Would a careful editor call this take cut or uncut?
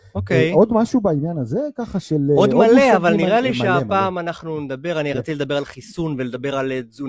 uncut